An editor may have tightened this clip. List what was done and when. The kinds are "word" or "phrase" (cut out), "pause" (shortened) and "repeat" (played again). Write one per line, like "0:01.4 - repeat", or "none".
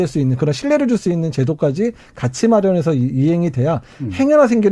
none